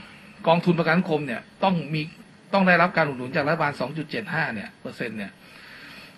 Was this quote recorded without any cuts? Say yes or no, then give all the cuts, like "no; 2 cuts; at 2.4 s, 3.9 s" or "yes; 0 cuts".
yes; 0 cuts